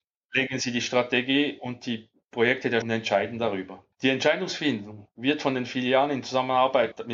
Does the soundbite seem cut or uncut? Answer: cut